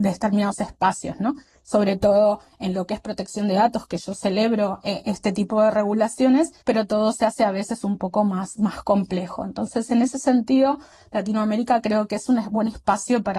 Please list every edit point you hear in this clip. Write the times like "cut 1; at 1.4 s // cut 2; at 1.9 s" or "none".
cut 1; at 6.6 s